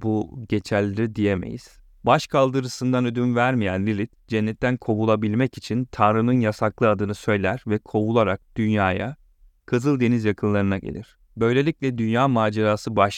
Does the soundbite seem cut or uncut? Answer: uncut